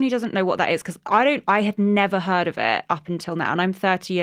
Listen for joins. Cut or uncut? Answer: uncut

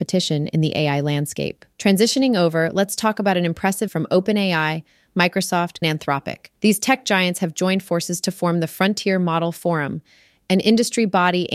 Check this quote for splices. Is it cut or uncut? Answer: cut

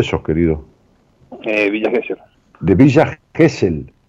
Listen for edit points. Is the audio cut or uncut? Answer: cut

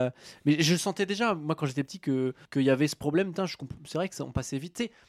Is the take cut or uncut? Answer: cut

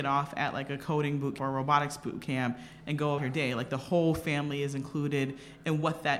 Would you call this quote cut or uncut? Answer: cut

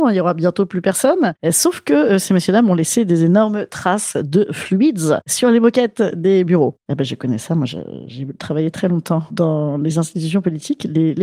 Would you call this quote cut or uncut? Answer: uncut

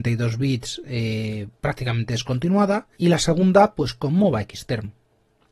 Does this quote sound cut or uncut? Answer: cut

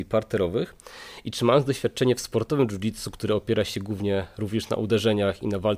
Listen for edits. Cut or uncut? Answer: uncut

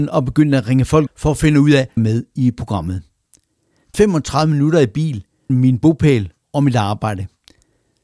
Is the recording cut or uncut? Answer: cut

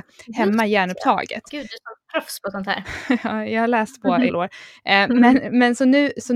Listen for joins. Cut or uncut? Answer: cut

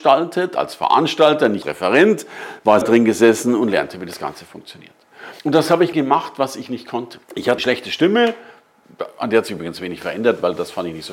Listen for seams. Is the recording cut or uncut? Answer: cut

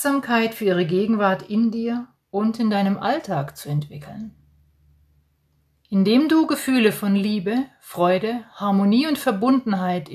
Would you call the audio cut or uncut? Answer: uncut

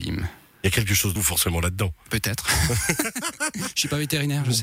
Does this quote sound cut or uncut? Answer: cut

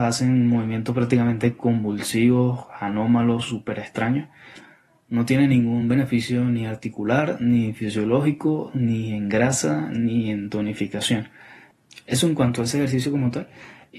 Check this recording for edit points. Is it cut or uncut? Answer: uncut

